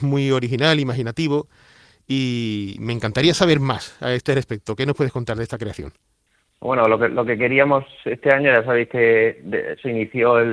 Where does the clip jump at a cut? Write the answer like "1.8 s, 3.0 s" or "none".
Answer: none